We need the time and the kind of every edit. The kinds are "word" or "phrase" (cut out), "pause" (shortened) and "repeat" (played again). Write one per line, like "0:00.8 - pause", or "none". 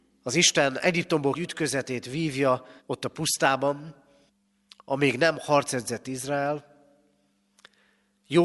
0:01.3 - phrase
0:02.8 - pause
0:04.3 - pause